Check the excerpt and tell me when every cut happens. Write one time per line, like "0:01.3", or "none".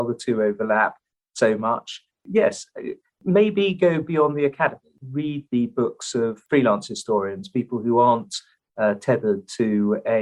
none